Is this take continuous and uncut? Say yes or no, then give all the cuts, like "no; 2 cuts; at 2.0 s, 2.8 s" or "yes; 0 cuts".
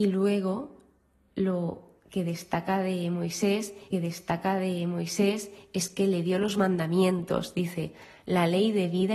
no; 1 cut; at 3.9 s